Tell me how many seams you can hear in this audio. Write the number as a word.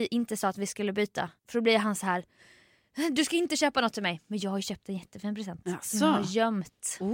one